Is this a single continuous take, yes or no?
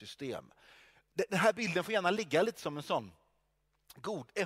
yes